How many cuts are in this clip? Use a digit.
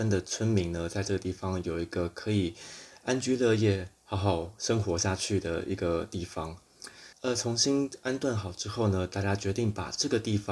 1